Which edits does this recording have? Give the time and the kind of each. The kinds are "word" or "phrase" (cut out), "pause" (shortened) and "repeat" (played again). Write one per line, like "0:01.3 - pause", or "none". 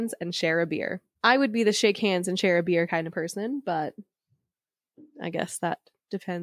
none